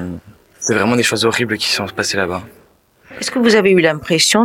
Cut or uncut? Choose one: uncut